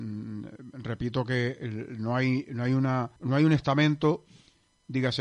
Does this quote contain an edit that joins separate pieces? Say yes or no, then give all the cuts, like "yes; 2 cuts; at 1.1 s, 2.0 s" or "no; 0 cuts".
yes; 1 cut; at 3.2 s